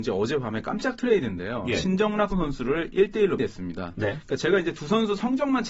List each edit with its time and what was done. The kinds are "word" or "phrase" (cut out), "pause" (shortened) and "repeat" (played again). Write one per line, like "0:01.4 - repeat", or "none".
0:02.3 - phrase
0:03.4 - word